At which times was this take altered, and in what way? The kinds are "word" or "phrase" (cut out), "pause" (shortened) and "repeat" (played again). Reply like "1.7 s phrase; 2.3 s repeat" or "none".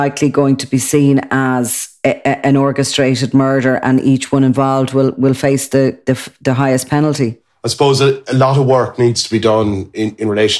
6.0 s word